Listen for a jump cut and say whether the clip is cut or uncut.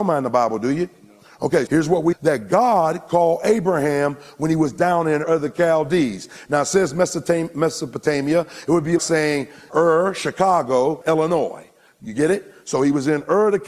cut